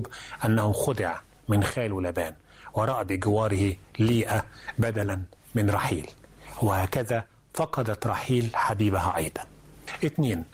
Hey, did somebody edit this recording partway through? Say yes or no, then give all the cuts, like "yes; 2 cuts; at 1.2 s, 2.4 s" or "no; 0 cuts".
no; 0 cuts